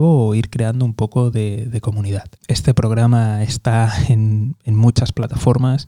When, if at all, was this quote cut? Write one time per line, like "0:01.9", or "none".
0:02.4